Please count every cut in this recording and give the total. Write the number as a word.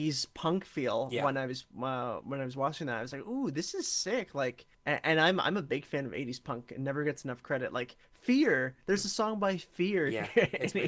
one